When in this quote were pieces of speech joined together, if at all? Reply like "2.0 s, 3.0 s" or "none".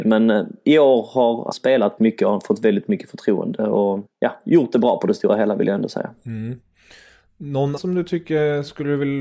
1.5 s, 2.0 s, 4.1 s, 7.8 s